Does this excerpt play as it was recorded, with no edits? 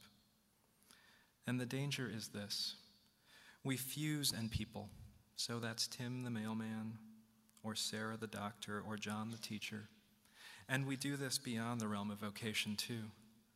no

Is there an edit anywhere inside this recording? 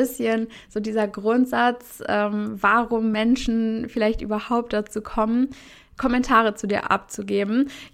no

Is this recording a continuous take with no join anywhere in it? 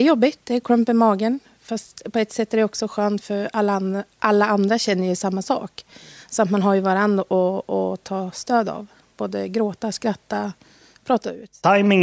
yes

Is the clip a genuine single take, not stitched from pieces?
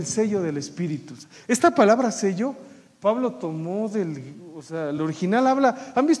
yes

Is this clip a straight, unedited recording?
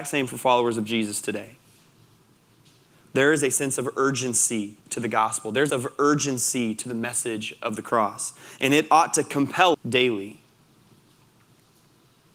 no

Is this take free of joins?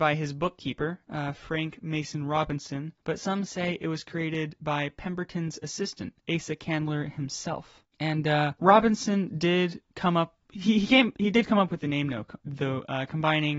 no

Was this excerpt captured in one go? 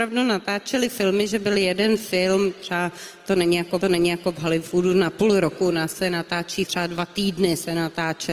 no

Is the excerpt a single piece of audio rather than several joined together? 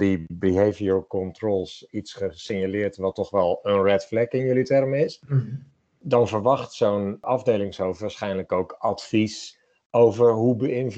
yes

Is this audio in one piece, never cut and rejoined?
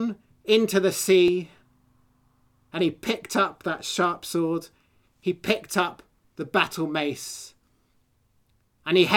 yes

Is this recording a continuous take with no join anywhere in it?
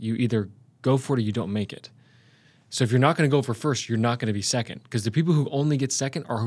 yes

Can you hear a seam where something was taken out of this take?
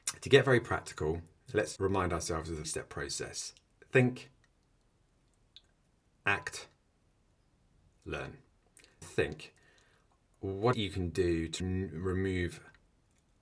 yes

